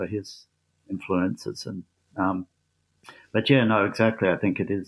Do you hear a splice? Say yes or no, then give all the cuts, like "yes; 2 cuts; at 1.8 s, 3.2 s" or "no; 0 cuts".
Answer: no; 0 cuts